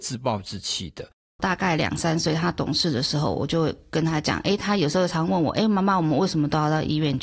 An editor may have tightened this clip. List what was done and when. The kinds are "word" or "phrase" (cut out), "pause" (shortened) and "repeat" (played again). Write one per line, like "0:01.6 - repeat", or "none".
none